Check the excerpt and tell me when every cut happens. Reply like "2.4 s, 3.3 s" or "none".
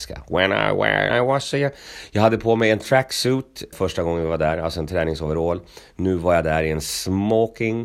1.1 s, 3.7 s